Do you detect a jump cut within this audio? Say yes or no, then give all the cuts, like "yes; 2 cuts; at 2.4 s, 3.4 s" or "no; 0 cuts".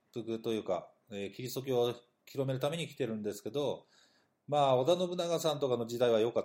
no; 0 cuts